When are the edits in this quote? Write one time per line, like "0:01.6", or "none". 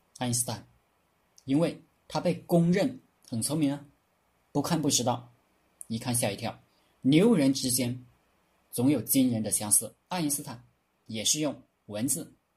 0:06.8
0:10.0